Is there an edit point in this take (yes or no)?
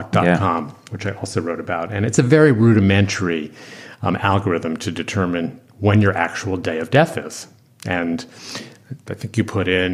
no